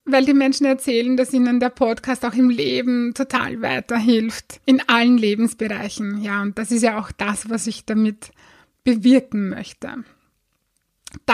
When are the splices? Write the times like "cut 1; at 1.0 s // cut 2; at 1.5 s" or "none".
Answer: cut 1; at 4.6 s